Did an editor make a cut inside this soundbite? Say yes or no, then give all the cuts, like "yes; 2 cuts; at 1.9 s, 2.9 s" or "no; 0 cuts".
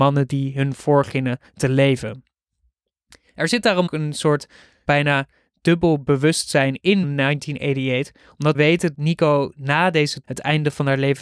yes; 6 cuts; at 3.9 s, 4.8 s, 7.0 s, 8.5 s, 8.9 s, 10.2 s